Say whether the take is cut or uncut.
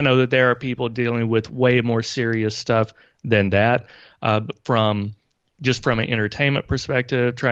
uncut